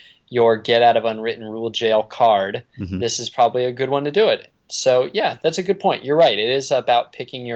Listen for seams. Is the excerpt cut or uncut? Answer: uncut